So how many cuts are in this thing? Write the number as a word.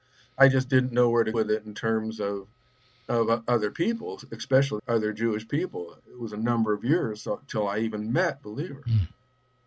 four